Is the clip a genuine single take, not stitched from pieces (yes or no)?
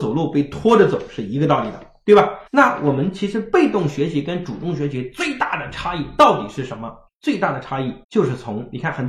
no